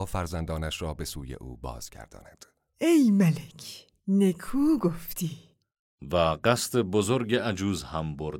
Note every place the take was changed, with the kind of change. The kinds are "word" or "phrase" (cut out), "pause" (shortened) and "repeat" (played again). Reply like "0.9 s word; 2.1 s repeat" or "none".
2.7 s pause; 4.0 s pause